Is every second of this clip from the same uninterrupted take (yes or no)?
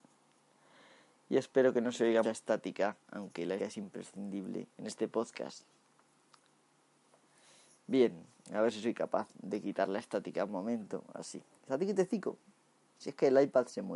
no